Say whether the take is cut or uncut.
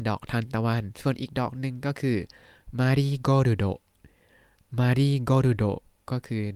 uncut